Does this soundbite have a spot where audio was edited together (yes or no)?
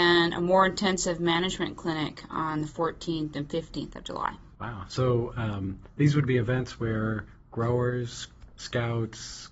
yes